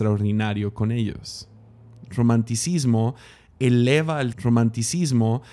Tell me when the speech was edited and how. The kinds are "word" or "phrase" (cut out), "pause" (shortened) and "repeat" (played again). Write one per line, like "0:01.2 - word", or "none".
0:04.3 - repeat